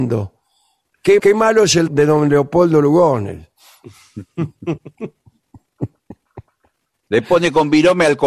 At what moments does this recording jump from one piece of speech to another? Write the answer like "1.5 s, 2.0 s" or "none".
1.2 s, 1.9 s